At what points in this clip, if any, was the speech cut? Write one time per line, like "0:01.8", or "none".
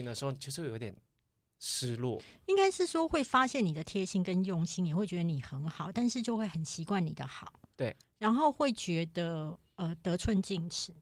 none